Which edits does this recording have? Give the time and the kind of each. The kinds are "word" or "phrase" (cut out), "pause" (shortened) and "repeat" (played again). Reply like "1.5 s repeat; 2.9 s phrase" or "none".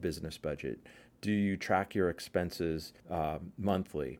3.0 s pause